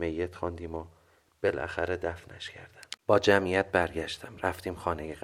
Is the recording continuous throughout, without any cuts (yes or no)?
no